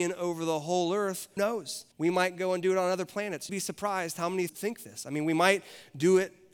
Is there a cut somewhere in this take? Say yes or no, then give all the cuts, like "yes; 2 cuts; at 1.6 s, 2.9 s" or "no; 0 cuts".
yes; 4 cuts; at 1.4 s, 1.9 s, 3.5 s, 4.5 s